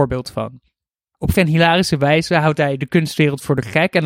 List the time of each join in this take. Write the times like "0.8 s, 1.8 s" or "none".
1.3 s